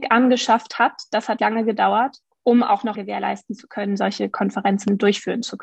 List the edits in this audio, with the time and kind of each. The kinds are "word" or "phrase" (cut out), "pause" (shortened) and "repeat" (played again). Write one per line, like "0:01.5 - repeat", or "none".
0:01.4 - word
0:02.2 - pause
0:02.9 - word